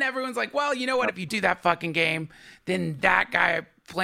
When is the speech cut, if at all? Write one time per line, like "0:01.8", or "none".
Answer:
0:01.3